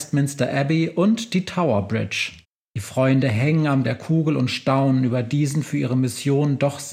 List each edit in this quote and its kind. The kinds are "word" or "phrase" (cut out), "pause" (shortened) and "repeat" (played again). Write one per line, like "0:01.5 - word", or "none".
0:02.4 - pause
0:03.8 - word